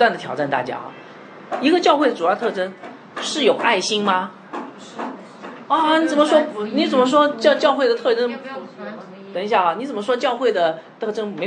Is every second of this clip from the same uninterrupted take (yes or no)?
yes